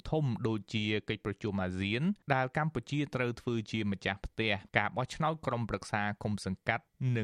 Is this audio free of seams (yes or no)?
no